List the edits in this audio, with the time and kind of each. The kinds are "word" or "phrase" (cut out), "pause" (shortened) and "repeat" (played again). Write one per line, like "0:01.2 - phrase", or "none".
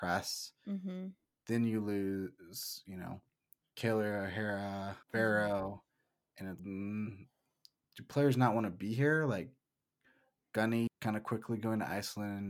0:05.0 - pause
0:06.6 - word
0:10.9 - word